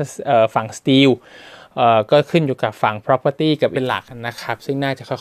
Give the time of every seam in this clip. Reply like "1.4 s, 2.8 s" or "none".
3.7 s